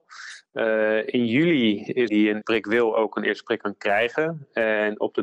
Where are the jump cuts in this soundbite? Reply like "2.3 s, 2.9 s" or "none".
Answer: 2.1 s, 2.4 s